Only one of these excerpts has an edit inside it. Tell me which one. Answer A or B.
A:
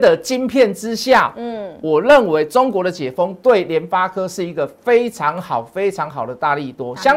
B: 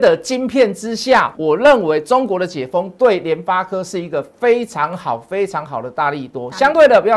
B